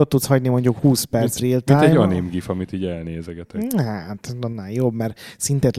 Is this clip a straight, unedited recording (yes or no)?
no